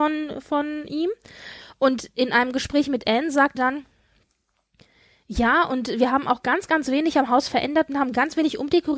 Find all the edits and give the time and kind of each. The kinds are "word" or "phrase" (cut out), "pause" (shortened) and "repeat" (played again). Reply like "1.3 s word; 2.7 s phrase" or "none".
3.5 s word